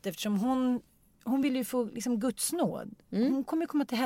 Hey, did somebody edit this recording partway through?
no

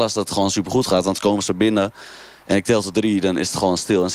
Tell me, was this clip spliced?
no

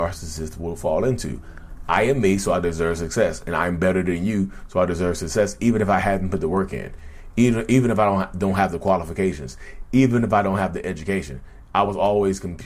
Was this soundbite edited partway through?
no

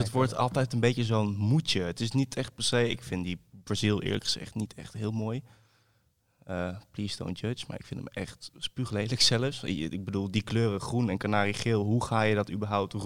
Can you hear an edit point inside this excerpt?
no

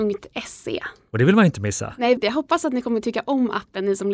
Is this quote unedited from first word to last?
no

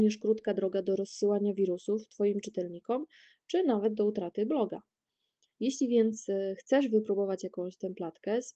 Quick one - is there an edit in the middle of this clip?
no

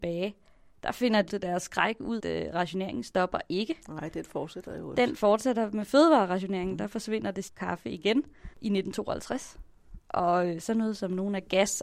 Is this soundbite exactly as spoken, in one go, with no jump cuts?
no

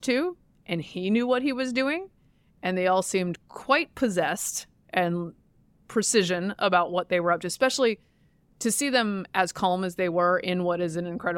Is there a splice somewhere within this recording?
no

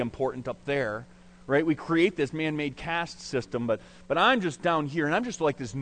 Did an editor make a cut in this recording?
no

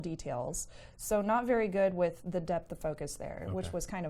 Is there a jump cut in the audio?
no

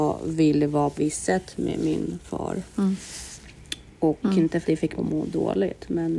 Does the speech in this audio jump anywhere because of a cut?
yes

